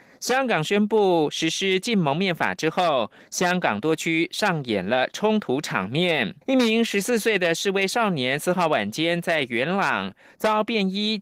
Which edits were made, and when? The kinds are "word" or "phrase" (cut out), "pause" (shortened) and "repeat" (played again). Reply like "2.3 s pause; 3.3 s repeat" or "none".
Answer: 6.4 s pause